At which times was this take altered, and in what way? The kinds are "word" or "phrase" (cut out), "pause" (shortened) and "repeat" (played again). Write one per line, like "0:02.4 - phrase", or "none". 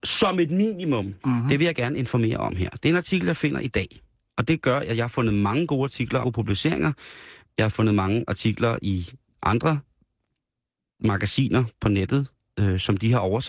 0:01.2 - pause
0:06.2 - word